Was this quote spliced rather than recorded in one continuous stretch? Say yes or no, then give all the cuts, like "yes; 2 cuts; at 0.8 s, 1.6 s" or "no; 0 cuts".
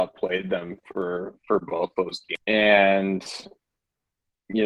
no; 0 cuts